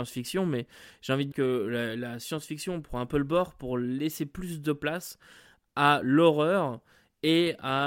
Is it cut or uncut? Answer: cut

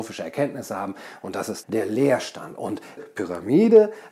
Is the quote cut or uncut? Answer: cut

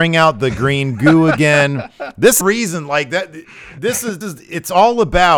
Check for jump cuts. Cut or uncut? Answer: cut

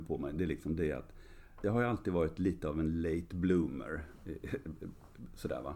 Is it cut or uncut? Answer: cut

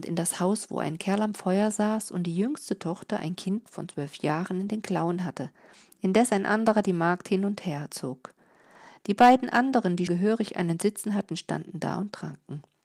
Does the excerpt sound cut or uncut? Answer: cut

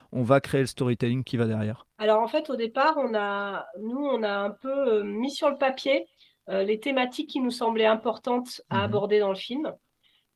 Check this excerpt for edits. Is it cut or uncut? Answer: uncut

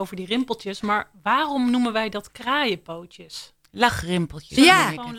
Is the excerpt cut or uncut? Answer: uncut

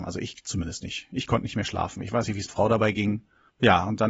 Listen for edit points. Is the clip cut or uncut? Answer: cut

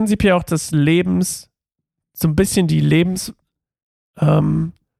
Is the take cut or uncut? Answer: uncut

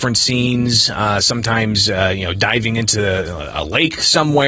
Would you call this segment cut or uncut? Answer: uncut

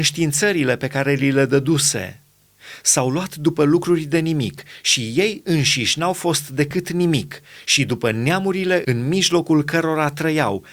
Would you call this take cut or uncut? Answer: uncut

